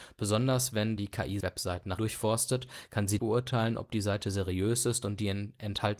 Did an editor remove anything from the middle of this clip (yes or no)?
yes